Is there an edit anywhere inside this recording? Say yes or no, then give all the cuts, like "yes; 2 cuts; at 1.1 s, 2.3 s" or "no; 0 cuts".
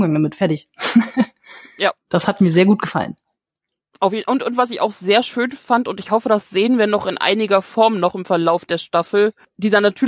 no; 0 cuts